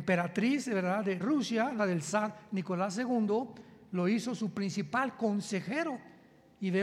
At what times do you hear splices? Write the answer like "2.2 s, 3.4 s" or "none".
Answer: 1.2 s, 1.8 s